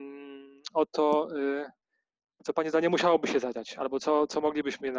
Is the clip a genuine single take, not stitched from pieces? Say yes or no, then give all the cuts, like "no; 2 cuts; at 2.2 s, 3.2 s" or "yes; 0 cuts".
yes; 0 cuts